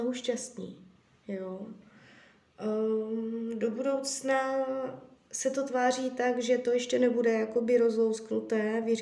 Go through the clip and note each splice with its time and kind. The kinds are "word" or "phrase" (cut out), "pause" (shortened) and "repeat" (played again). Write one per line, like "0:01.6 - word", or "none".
none